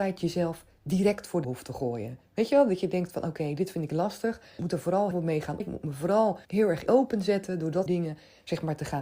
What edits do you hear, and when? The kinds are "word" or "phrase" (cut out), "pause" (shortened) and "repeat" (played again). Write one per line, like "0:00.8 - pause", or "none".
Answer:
0:01.4 - word
0:02.3 - pause
0:04.6 - phrase
0:05.1 - word
0:05.6 - word
0:06.4 - pause
0:06.9 - phrase
0:07.9 - word

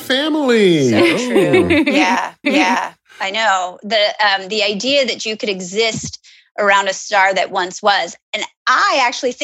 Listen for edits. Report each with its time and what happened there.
0:02.4 - repeat

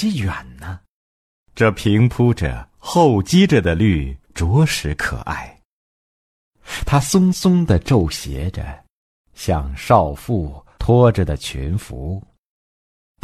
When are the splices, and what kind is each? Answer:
0:04.2 - pause

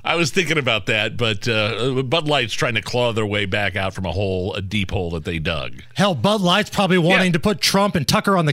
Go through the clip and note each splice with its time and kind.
none

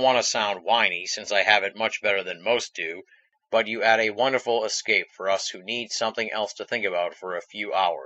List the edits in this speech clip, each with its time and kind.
none

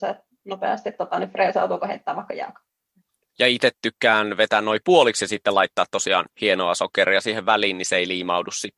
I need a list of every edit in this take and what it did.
none

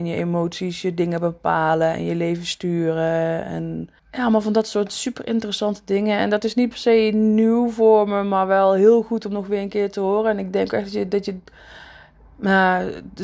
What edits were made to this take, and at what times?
0:04.0 - pause

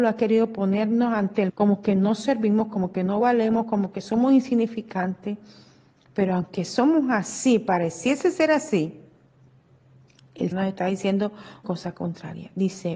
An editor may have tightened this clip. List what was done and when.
0:01.5 - word
0:10.5 - word
0:11.6 - word

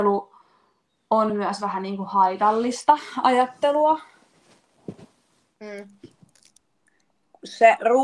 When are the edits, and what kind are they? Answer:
none

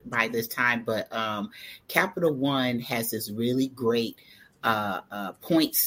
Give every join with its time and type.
none

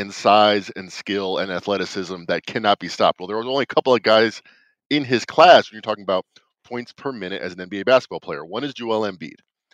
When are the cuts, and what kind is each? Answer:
none

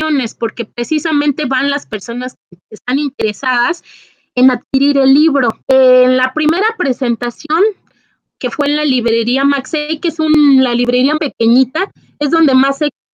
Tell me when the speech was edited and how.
0:05.6 - pause
0:11.2 - word

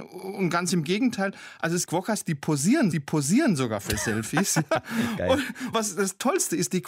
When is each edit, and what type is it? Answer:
0:01.9 - word
0:02.9 - repeat
0:05.7 - word

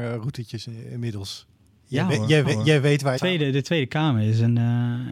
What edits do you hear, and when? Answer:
0:02.4 - repeat
0:03.2 - phrase

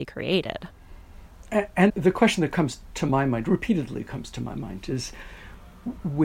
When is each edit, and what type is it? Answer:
none

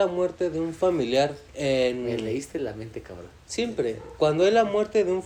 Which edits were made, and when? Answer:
0:01.5 - pause

